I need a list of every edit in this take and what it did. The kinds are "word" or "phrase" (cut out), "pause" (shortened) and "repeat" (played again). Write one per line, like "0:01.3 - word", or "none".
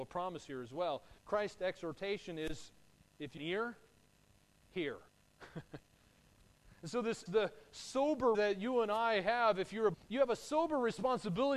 0:01.2 - pause
0:03.0 - pause
0:03.4 - phrase
0:05.1 - pause
0:07.3 - word
0:08.3 - word
0:09.9 - word